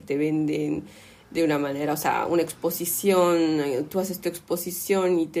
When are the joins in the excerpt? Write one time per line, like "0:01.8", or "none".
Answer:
none